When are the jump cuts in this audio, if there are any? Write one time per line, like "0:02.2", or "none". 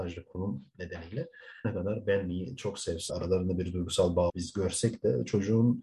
0:01.6
0:03.1
0:04.3